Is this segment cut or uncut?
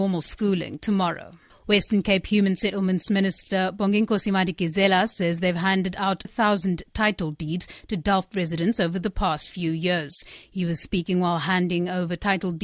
cut